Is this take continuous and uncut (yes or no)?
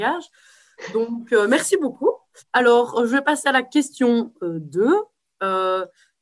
no